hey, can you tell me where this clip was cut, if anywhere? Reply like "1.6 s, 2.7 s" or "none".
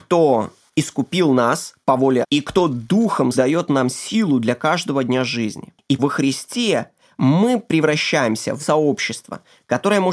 2.2 s, 3.3 s, 6.0 s, 8.6 s